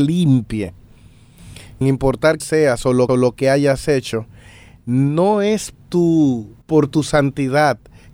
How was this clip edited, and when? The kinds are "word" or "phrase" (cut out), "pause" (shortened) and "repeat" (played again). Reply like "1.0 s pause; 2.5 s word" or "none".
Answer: 1.8 s word; 2.4 s word; 3.1 s repeat; 5.7 s word; 6.6 s pause